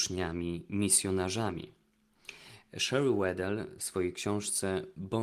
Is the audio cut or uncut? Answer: uncut